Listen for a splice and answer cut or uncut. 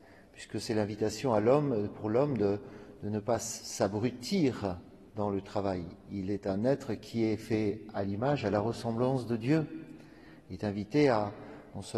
cut